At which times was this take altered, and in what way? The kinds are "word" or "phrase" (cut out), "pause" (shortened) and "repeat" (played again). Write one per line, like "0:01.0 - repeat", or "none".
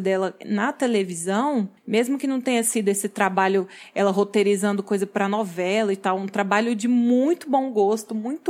0:01.8 - pause